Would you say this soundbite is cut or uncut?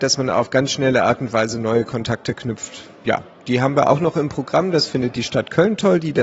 uncut